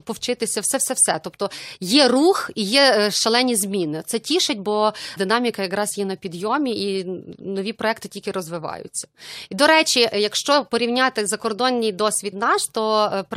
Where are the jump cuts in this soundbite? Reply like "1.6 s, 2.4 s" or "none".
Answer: 5.2 s, 12.3 s